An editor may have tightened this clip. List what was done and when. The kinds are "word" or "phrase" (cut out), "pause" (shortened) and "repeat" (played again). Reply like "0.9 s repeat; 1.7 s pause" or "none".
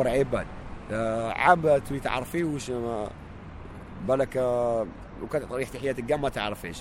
none